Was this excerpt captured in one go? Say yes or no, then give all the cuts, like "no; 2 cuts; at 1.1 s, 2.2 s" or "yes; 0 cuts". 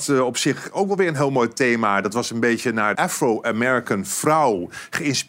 no; 1 cut; at 3.0 s